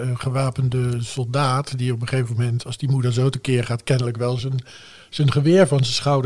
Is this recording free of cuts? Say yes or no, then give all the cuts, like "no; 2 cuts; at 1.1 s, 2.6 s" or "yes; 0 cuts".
yes; 0 cuts